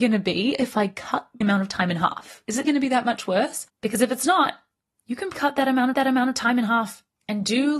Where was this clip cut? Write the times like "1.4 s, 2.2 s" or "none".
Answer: 1.4 s, 2.6 s, 5.3 s, 5.9 s